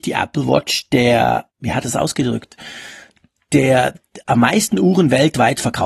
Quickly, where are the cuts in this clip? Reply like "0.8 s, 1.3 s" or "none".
1.5 s, 1.8 s, 4.2 s